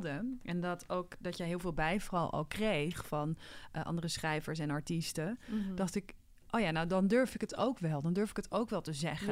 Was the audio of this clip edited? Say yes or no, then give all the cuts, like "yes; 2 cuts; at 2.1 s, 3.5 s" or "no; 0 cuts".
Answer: no; 0 cuts